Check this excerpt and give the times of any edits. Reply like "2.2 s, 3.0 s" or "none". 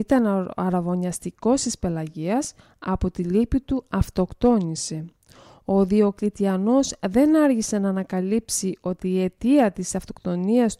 none